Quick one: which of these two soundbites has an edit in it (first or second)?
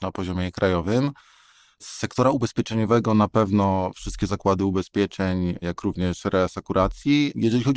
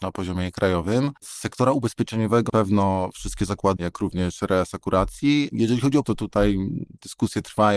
second